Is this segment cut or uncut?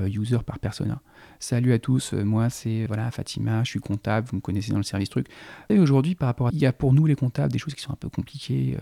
cut